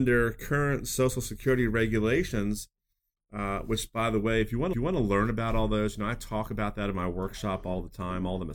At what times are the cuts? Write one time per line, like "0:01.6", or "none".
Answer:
0:04.7